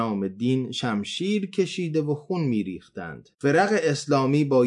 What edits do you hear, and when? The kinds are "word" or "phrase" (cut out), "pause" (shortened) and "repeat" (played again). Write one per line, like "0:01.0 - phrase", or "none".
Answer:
0:03.3 - pause